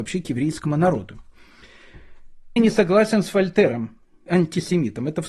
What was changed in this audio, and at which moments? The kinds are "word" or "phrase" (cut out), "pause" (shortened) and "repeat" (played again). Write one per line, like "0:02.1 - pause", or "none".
0:02.6 - word
0:04.3 - word